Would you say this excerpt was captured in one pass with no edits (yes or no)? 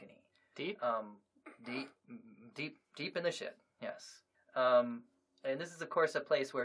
no